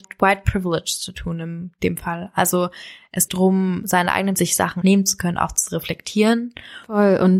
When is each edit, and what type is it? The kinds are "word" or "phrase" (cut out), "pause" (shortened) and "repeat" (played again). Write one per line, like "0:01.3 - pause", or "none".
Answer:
0:03.3 - word
0:04.4 - word
0:04.8 - word